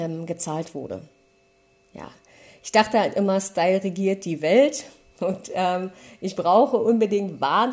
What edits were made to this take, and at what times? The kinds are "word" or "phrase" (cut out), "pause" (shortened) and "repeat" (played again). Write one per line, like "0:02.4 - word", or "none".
none